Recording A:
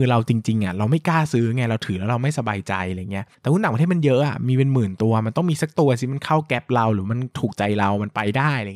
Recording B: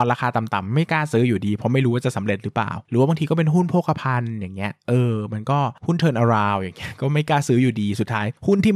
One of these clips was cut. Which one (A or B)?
A